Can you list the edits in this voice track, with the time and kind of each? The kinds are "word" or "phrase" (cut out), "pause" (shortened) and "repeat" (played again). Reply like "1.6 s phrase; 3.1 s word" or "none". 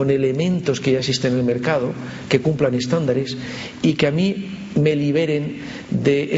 none